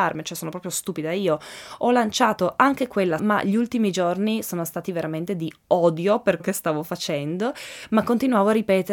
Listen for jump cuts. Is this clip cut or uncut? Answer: cut